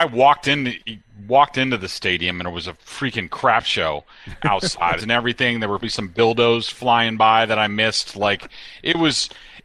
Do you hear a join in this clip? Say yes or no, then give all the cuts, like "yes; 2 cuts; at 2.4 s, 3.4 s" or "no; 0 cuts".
yes; 2 cuts; at 5.0 s, 5.8 s